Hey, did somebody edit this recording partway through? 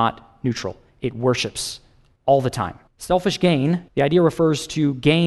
yes; 2 cuts; at 2.9 s, 3.9 s

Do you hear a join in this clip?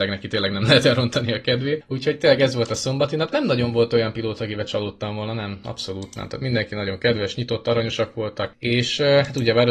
no; 0 cuts

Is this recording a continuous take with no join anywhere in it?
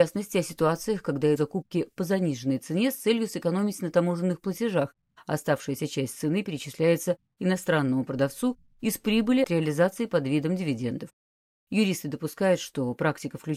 no; 2 cuts; at 1.4 s, 9.4 s

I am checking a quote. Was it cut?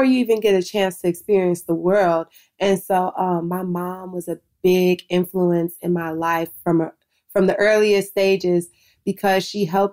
no; 0 cuts

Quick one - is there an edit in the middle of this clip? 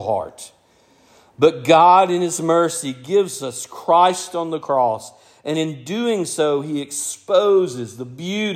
no; 0 cuts

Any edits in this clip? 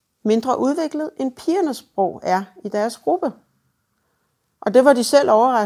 no; 0 cuts

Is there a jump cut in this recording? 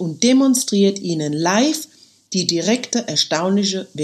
no; 0 cuts

